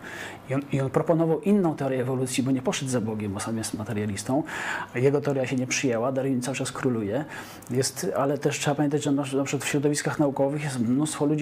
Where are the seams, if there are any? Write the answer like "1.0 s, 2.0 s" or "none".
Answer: none